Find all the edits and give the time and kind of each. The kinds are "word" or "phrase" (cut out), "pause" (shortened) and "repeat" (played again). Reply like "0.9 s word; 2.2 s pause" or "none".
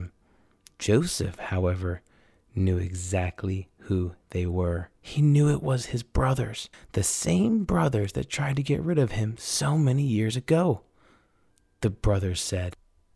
5.0 s pause; 6.7 s pause